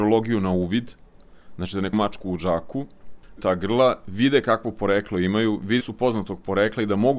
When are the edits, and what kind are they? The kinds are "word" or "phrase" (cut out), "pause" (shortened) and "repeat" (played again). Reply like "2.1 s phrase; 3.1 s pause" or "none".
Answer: 1.9 s word; 3.4 s phrase; 5.8 s word